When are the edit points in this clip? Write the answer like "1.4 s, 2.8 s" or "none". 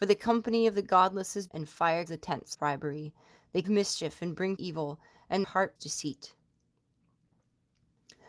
1.5 s, 2.1 s, 2.5 s, 3.6 s, 4.6 s, 5.4 s, 5.8 s